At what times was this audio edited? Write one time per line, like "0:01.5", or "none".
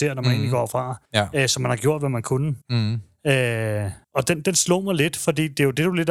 0:01.1
0:02.6
0:04.0